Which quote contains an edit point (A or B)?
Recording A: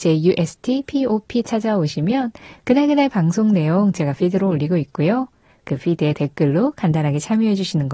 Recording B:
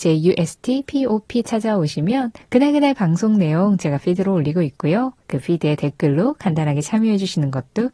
B